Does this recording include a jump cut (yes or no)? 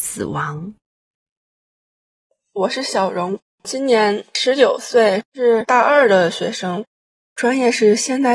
yes